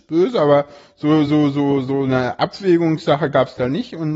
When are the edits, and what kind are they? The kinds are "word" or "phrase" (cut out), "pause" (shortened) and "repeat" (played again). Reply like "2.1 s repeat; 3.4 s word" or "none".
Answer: none